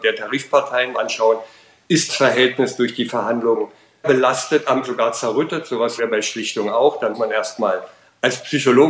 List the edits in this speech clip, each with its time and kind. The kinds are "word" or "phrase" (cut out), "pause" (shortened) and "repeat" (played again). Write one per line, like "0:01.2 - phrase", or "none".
0:00.9 - word
0:02.1 - word
0:03.1 - word
0:04.0 - word
0:04.8 - word
0:06.0 - word
0:07.1 - word